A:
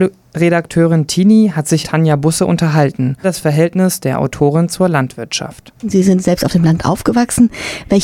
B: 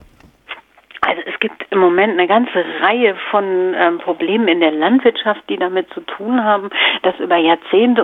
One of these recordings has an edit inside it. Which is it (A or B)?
A